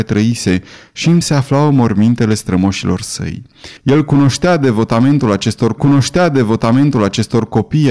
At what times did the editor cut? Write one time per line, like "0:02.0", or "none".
0:01.2
0:03.8
0:05.8